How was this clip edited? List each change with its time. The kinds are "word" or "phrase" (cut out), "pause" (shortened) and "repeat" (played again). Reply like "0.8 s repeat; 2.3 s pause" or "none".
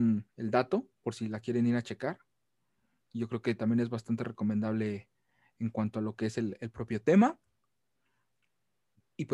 none